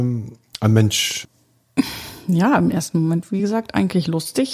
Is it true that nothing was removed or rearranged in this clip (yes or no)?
yes